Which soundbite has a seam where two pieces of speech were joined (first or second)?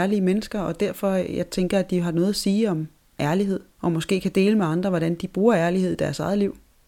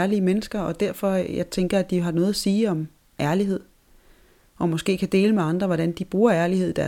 first